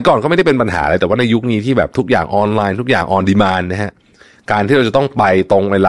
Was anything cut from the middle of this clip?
no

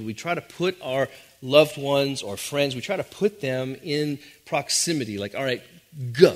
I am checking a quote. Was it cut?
no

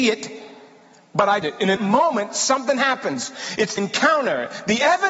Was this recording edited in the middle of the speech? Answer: yes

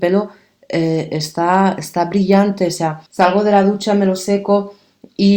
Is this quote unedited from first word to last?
no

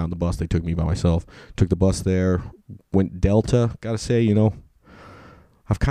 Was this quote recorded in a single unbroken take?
yes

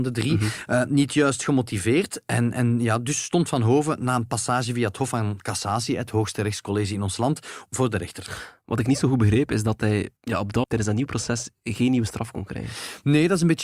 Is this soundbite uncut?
no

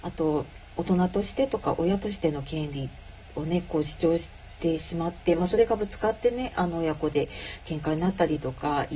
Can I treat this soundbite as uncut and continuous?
yes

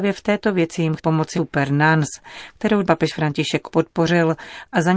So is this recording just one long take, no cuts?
no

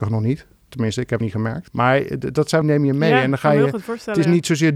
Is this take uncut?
no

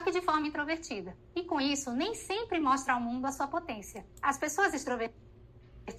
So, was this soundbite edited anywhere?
no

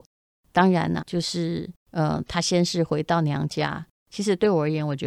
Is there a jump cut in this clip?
yes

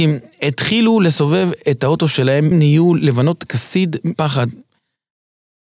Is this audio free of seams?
no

